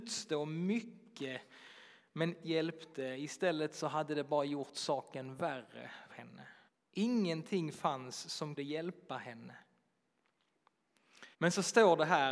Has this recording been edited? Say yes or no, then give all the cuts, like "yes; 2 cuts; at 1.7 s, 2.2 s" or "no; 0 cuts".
yes; 5 cuts; at 2.4 s, 6.1 s, 6.7 s, 8.6 s, 11.3 s